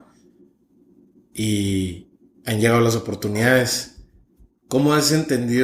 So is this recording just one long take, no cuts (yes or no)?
yes